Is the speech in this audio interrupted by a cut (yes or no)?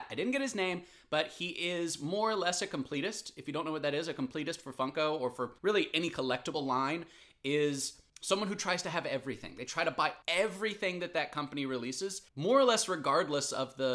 yes